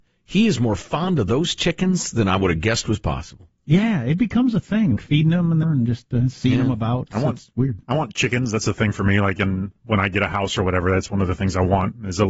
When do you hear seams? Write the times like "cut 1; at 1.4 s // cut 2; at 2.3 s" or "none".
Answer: cut 1; at 5.0 s // cut 2; at 5.6 s

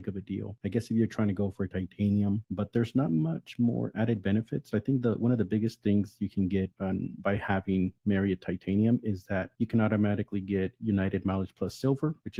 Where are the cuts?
none

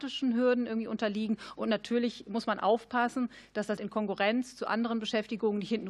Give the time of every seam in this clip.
cut 1; at 3.8 s

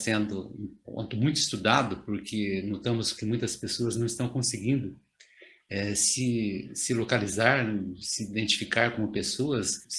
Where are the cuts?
none

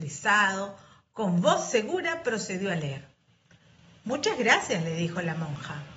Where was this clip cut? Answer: none

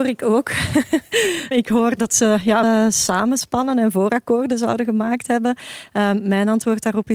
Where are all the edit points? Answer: cut 1; at 1.5 s // cut 2; at 2.6 s

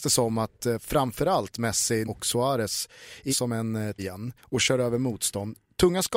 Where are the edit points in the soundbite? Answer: cut 1; at 2.0 s // cut 2; at 3.3 s // cut 3; at 4.0 s // cut 4; at 4.4 s

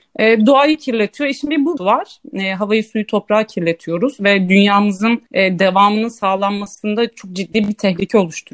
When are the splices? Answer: cut 1; at 1.8 s // cut 2; at 5.3 s

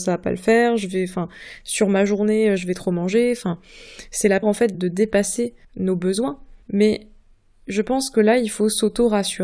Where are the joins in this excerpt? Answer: cut 1; at 4.4 s // cut 2; at 4.7 s // cut 3; at 5.6 s // cut 4; at 6.6 s

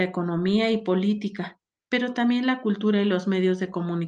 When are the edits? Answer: none

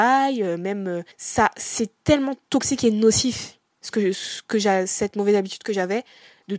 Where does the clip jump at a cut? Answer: cut 1; at 1.1 s

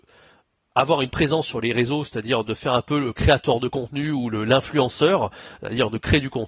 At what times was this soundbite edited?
none

